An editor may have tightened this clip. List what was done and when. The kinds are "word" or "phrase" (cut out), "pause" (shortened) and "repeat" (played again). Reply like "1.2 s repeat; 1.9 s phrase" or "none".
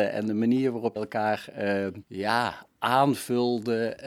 1.0 s word; 2.0 s pause